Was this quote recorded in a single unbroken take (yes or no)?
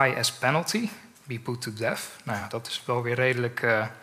yes